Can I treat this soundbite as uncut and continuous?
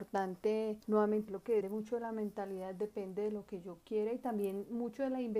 no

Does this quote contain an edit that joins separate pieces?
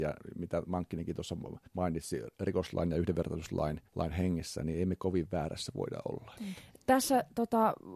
yes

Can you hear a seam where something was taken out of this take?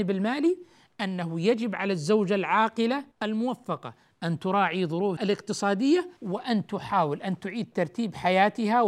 yes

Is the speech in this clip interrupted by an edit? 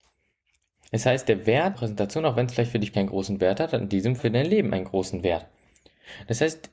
yes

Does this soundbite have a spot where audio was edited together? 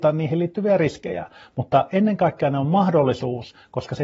no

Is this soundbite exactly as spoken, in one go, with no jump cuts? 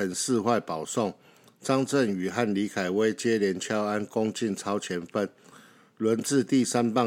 yes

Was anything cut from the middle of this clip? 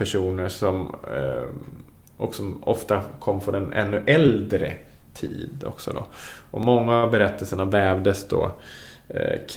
no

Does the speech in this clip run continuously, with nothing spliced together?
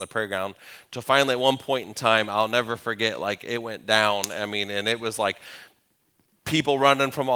yes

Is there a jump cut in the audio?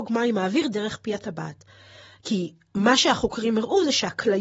no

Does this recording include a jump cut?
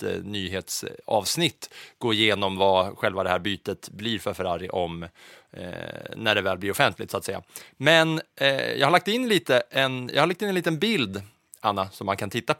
no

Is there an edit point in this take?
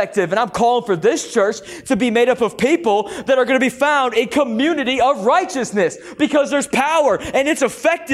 no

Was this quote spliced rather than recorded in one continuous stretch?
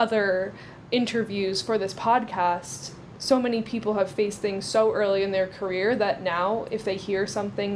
no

